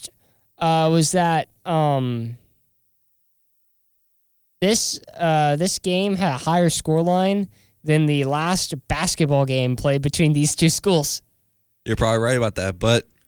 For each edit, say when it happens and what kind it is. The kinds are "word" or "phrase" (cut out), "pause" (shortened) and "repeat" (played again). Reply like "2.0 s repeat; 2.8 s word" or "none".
none